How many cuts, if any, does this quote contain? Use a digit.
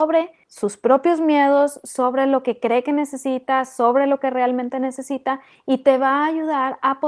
0